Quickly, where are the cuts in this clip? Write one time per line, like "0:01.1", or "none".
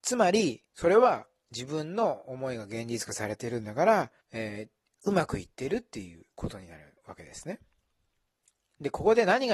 0:04.2
0:06.3
0:07.0